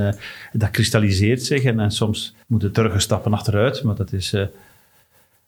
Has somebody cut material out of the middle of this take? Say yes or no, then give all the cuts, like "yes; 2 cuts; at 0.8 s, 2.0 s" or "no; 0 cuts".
yes; 1 cut; at 2.4 s